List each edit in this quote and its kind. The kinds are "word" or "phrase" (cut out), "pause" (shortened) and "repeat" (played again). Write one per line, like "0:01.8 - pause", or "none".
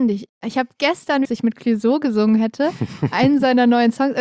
0:01.2 - phrase